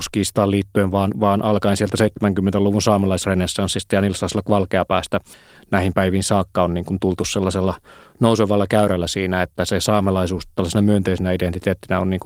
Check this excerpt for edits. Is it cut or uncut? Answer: uncut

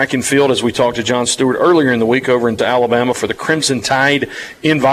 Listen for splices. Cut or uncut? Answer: cut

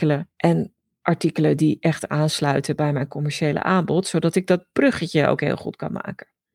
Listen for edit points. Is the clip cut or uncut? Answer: uncut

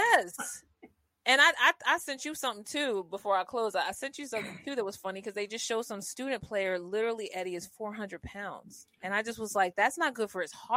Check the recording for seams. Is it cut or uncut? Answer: uncut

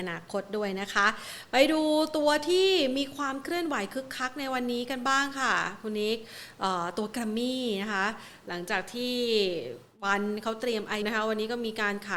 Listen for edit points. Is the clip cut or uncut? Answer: cut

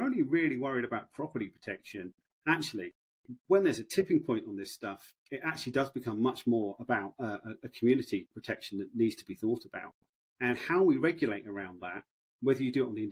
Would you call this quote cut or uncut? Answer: uncut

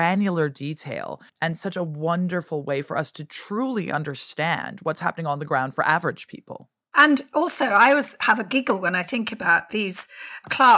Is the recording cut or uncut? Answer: cut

